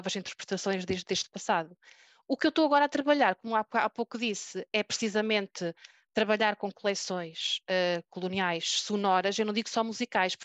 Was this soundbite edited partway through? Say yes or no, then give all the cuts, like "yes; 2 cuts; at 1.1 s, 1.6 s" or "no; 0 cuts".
no; 0 cuts